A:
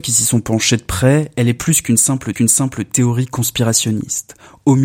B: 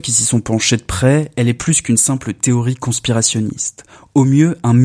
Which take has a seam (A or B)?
A